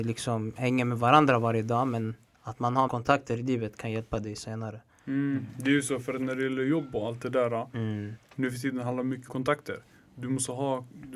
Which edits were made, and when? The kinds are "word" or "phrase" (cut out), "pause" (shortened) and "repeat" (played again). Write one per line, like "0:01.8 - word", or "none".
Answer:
0:02.9 - word
0:09.3 - word